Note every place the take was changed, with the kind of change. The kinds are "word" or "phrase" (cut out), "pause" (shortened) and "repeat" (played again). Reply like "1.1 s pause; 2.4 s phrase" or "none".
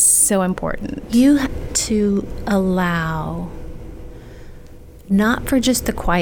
1.7 s word